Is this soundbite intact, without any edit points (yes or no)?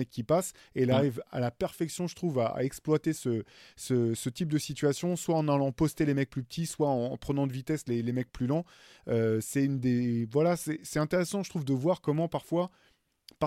yes